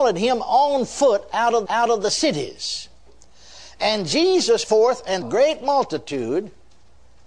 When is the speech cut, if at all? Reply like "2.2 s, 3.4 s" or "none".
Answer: 1.7 s, 4.6 s, 5.2 s